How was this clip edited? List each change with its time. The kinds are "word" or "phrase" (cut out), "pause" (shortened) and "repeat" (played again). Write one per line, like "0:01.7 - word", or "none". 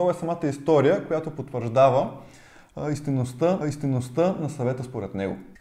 0:03.6 - repeat